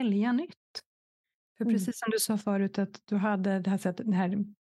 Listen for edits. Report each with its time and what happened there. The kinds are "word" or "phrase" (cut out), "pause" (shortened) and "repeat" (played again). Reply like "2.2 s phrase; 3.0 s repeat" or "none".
none